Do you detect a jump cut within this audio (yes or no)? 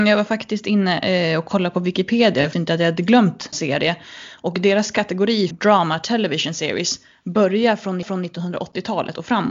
yes